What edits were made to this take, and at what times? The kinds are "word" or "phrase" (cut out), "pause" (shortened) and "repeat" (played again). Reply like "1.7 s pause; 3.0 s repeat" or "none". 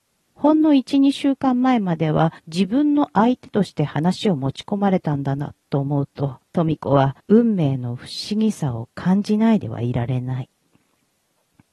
2.4 s pause; 6.4 s pause; 7.2 s pause